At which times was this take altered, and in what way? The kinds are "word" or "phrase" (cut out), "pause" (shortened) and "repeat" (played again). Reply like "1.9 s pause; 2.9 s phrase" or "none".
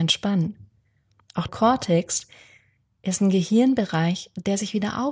1.5 s phrase